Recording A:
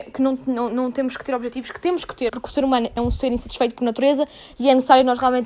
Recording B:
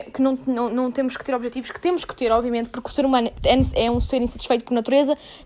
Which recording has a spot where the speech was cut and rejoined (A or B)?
A